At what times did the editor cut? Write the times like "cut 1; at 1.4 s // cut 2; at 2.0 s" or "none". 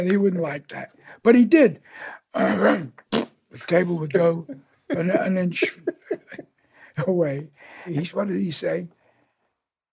none